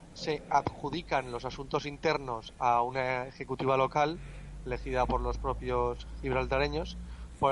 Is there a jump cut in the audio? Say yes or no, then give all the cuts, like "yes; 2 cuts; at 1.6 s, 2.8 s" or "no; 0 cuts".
no; 0 cuts